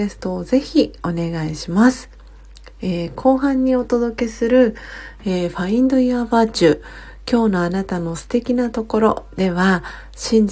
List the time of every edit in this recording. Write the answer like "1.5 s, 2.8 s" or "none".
none